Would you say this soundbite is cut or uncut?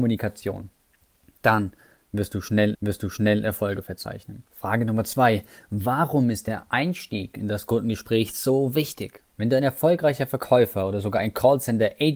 cut